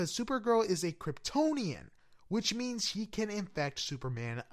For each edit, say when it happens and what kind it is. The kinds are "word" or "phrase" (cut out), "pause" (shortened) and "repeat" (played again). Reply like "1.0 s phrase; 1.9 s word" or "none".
none